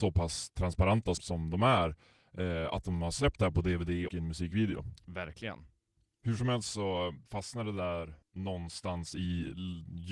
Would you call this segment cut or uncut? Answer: cut